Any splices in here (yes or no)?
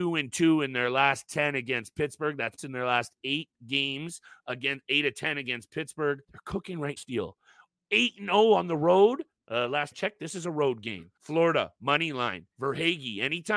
yes